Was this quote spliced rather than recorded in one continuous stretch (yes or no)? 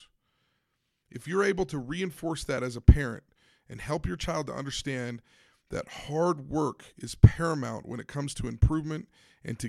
no